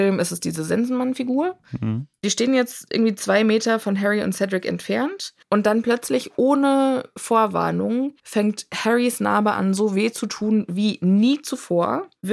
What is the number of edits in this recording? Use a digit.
2